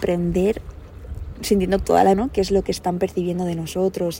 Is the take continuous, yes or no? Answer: no